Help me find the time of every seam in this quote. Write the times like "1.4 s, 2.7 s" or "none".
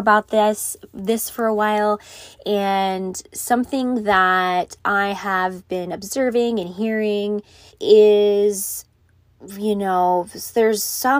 7.7 s